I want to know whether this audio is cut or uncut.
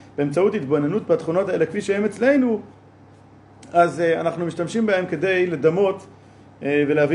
uncut